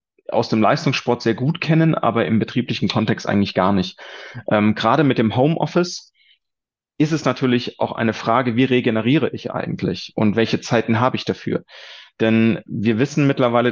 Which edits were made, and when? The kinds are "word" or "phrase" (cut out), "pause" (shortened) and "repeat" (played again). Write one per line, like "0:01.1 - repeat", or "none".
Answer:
none